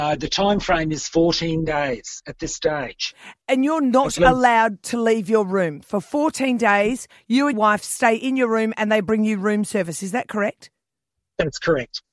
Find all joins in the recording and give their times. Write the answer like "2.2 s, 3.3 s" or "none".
3.4 s, 7.5 s